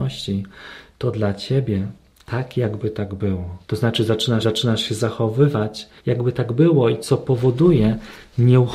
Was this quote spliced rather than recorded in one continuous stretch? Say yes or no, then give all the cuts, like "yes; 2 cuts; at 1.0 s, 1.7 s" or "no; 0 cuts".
yes; 4 cuts; at 2.1 s, 3.6 s, 4.4 s, 6.0 s